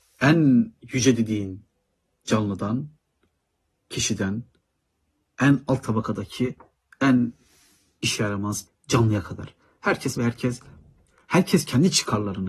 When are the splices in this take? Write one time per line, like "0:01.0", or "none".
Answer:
0:08.7
0:10.2